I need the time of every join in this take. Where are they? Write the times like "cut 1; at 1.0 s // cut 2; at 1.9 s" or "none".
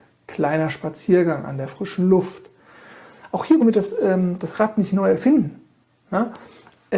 cut 1; at 3.6 s